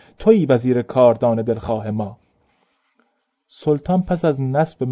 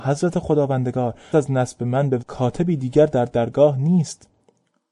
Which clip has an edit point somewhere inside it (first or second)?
second